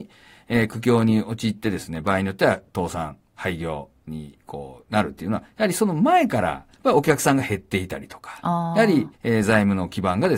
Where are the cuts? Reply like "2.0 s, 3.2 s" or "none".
6.7 s, 9.1 s